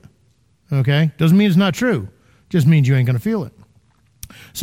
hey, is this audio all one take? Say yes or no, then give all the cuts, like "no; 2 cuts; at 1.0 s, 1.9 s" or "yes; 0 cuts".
yes; 0 cuts